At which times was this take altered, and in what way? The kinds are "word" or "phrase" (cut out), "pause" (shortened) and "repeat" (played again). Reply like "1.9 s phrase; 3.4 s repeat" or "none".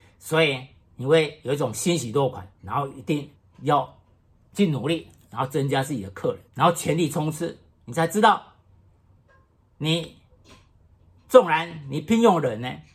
2.5 s pause; 3.3 s pause; 6.5 s pause

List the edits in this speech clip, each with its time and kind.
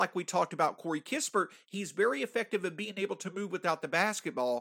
none

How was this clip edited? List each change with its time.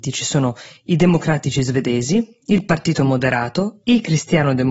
none

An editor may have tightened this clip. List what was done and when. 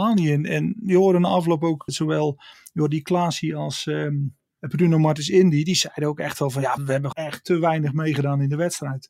1.9 s word; 6.8 s word; 7.1 s phrase

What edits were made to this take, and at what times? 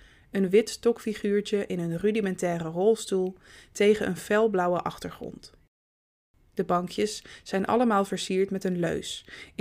none

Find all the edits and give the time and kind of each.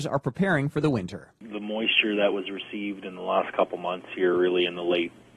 none

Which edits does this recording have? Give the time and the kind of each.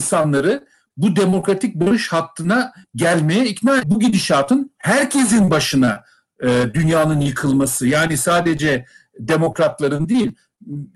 3.8 s phrase

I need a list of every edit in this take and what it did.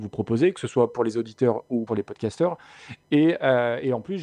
1.9 s phrase

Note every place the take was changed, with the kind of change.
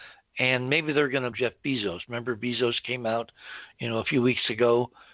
1.3 s phrase

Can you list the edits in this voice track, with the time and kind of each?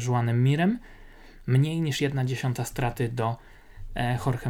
none

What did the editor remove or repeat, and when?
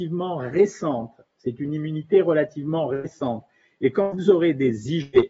none

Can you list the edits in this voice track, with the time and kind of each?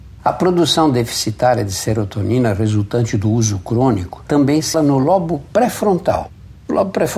4.7 s word

